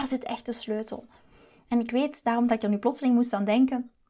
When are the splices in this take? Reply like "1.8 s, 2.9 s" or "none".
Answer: none